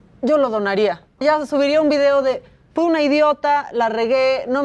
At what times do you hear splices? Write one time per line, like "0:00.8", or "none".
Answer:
0:01.2